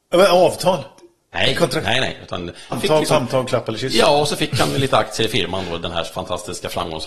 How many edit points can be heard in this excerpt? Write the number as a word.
one